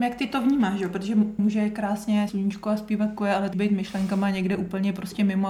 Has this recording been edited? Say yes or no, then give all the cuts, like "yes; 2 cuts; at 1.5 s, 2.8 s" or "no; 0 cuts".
yes; 4 cuts; at 1.4 s, 2.3 s, 3.2 s, 3.5 s